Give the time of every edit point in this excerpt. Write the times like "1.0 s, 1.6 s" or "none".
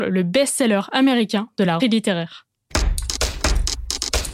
1.8 s